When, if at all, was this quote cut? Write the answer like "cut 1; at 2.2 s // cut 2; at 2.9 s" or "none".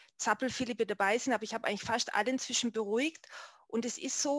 none